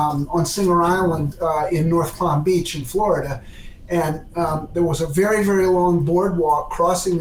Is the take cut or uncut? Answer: cut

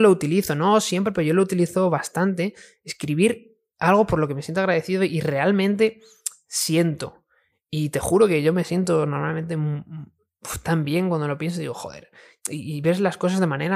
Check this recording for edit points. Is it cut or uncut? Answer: uncut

